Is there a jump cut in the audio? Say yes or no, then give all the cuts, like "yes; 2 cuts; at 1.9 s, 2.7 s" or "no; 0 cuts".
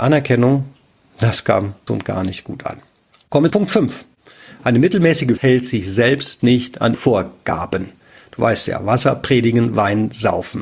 yes; 4 cuts; at 1.9 s, 3.5 s, 5.4 s, 6.9 s